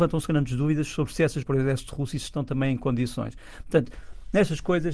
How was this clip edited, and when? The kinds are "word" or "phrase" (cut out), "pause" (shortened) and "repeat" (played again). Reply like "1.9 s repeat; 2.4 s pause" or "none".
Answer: 1.4 s phrase